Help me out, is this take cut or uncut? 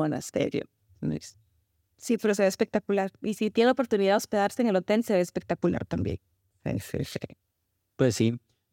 uncut